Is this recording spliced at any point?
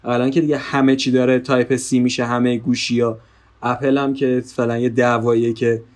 no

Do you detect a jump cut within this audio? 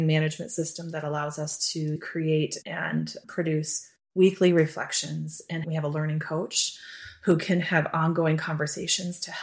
no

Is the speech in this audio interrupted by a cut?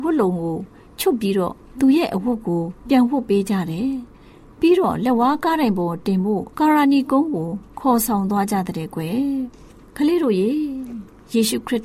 yes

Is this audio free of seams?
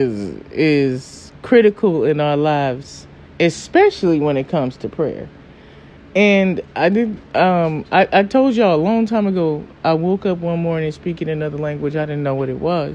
yes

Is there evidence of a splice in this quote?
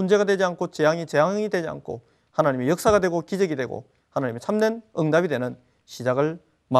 no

